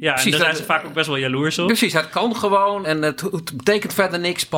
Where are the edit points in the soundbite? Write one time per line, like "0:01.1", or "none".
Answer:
0:02.8